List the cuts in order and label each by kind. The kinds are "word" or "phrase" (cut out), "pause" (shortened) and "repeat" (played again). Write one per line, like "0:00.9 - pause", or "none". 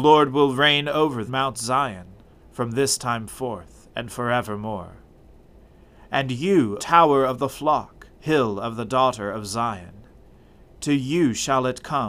0:01.3 - phrase
0:02.2 - pause
0:06.8 - word
0:08.1 - pause